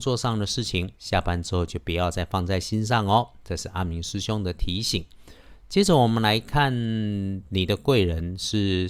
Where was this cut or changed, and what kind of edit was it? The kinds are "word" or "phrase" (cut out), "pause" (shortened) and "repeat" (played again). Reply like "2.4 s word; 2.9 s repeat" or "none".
1.0 s pause